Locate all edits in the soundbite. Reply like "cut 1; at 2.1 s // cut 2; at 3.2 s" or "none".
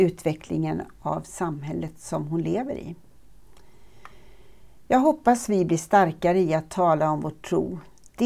none

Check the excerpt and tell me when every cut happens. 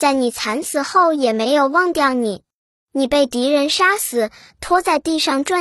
none

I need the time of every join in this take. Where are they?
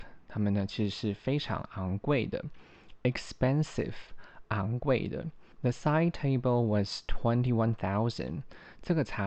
cut 1; at 5.5 s

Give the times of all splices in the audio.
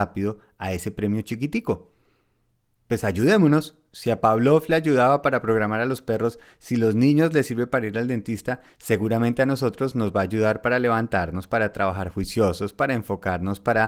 none

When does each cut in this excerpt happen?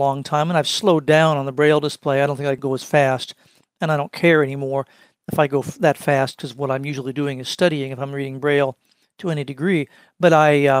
none

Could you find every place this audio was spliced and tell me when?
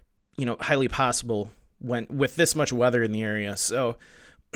none

